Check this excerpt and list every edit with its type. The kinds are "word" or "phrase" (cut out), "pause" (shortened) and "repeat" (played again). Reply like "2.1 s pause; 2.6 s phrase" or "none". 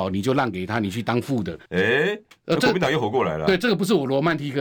1.7 s pause